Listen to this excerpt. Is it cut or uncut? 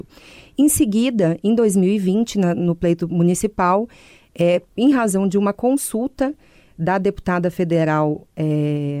uncut